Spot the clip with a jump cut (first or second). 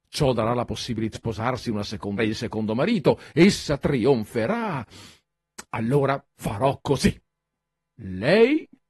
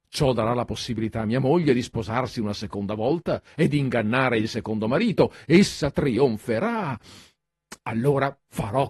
first